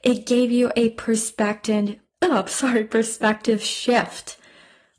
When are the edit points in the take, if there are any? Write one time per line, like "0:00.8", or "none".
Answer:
none